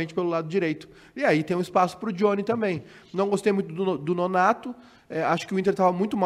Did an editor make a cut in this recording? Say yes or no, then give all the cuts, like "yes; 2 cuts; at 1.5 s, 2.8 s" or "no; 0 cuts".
no; 0 cuts